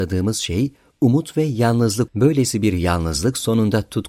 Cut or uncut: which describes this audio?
cut